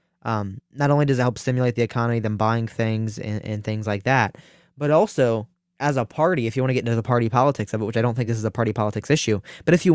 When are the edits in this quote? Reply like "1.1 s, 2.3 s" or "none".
none